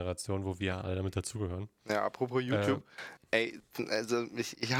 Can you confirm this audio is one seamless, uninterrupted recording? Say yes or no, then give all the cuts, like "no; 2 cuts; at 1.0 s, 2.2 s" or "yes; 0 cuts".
yes; 0 cuts